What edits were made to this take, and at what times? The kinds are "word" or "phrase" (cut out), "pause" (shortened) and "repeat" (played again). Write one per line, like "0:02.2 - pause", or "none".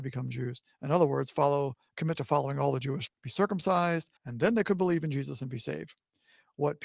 0:03.1 - word
0:04.2 - pause